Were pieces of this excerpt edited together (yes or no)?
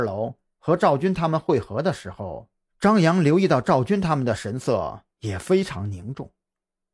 yes